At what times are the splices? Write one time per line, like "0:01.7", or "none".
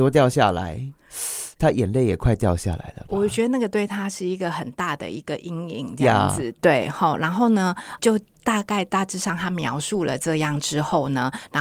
0:08.0